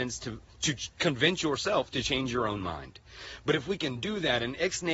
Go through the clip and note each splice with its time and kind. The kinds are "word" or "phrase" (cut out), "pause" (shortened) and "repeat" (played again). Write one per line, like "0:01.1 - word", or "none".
none